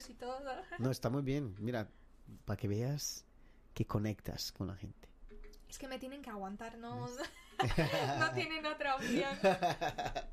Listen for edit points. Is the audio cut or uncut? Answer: uncut